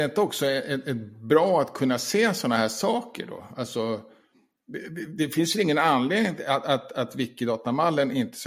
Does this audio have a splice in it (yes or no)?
no